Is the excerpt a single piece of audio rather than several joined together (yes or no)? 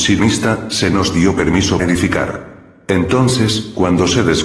no